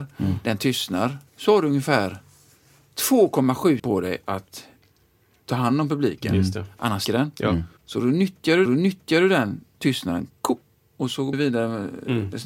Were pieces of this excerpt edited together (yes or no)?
yes